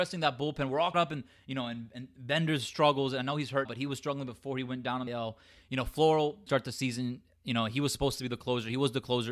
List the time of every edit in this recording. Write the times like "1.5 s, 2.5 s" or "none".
0.9 s, 3.6 s, 5.1 s, 6.5 s